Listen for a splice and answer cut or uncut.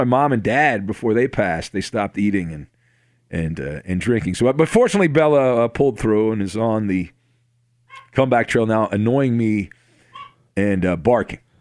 uncut